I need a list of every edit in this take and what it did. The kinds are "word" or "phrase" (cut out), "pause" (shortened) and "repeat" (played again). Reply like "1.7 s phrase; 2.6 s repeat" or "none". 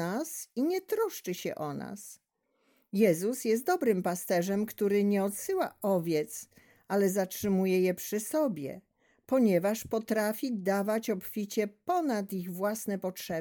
none